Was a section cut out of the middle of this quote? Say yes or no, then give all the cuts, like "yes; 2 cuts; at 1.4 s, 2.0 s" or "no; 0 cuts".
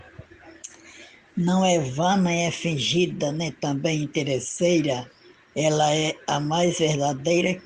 no; 0 cuts